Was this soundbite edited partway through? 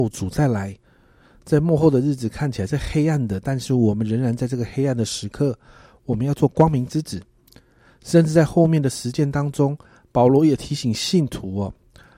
no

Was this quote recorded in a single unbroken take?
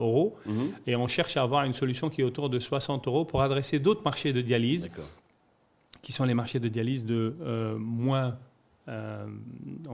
yes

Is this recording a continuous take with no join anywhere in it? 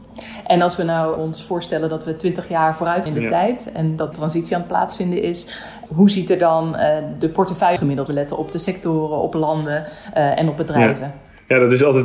no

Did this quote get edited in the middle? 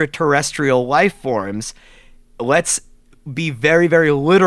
no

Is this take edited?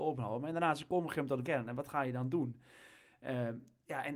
yes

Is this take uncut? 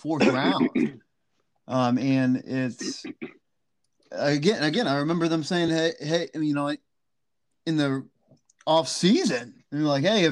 yes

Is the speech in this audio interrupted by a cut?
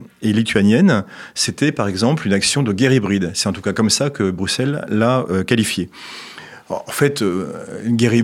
no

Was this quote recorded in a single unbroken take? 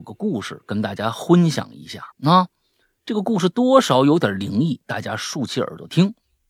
no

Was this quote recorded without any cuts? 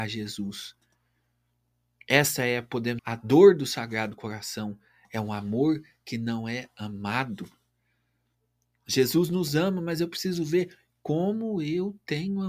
no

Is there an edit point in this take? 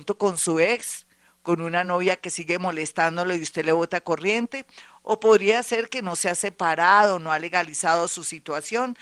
no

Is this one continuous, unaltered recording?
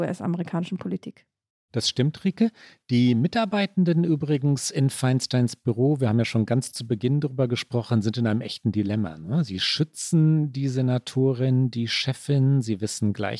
yes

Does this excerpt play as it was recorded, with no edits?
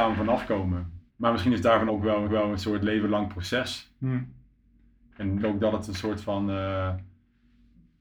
no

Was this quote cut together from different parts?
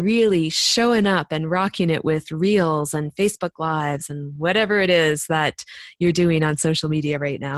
no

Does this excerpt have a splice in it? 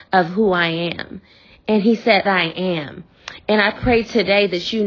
yes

